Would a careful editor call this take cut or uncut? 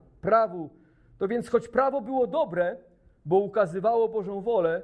uncut